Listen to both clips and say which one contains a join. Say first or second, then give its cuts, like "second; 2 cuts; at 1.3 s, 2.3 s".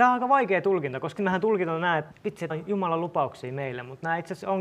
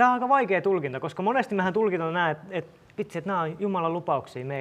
first; 3 cuts; at 1.2 s, 2.1 s, 2.5 s